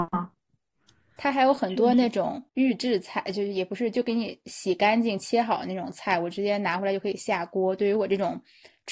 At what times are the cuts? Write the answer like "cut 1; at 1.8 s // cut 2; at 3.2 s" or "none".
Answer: cut 1; at 2.5 s